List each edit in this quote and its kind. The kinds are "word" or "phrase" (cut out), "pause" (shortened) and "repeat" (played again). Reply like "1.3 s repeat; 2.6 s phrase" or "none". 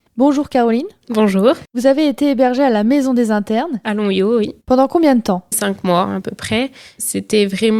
5.5 s phrase